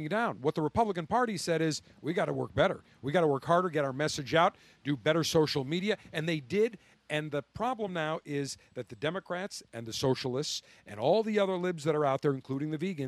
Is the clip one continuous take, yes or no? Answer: yes